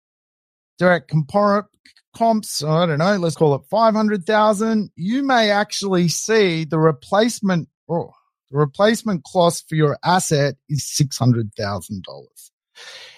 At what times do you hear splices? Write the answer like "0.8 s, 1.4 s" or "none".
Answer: 3.3 s, 10.8 s